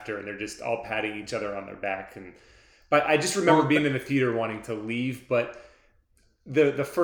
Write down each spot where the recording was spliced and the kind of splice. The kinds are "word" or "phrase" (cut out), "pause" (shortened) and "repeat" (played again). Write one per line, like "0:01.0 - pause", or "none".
none